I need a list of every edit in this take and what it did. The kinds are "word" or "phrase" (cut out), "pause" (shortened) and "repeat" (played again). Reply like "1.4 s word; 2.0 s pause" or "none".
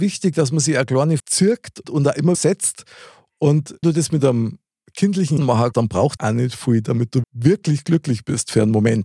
1.2 s word; 1.8 s word; 2.3 s word; 3.8 s word; 5.4 s word; 5.7 s word; 6.2 s word; 7.2 s word

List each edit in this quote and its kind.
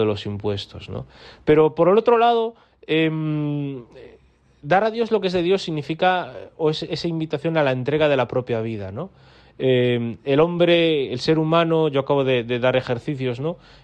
none

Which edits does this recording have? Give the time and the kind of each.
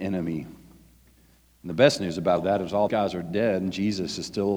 2.4 s word; 2.9 s word

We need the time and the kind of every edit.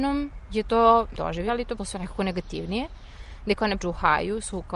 1.1 s word; 1.5 s word; 1.8 s word; 3.8 s phrase

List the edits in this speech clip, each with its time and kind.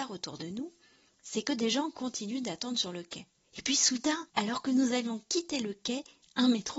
3.3 s pause; 4.3 s pause

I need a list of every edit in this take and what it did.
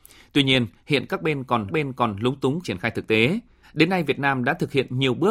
1.7 s repeat; 2.6 s word; 3.6 s pause

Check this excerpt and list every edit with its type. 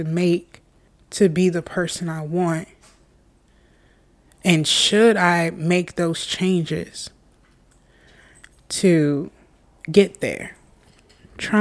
none

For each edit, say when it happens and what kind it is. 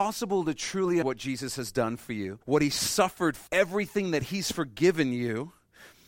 1.0 s word; 2.4 s pause; 3.5 s word

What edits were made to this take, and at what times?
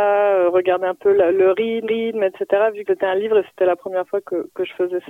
1.8 s repeat; 2.9 s word

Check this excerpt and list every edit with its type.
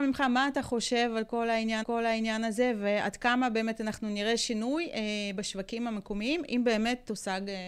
1.8 s repeat

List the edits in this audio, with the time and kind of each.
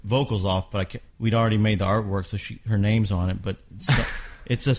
1.1 s pause

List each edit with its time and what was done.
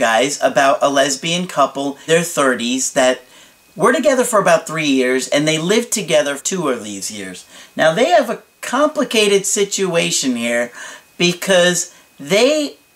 2.1 s word; 6.4 s word

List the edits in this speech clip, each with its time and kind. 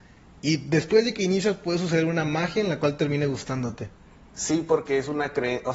none

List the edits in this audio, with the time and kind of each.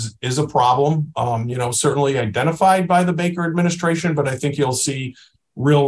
none

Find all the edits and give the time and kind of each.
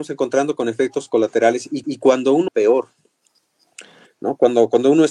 1.8 s repeat; 2.5 s phrase

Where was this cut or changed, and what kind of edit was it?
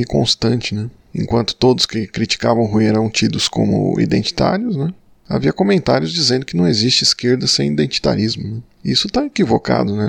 none

